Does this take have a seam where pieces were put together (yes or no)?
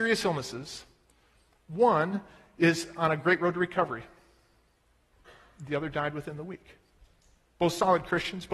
no